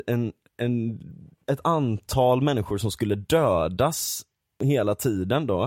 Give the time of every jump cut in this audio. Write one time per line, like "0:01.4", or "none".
none